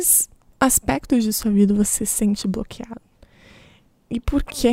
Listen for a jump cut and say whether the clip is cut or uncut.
uncut